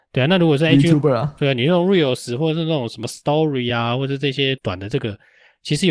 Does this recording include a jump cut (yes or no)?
no